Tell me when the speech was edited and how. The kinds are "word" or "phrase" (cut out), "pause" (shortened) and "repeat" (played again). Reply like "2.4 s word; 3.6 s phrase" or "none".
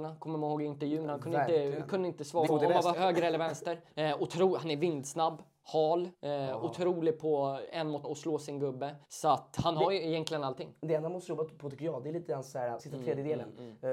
2.5 s word; 2.9 s word; 3.9 s pause; 6.1 s pause; 8.0 s word; 9.0 s pause; 12.8 s word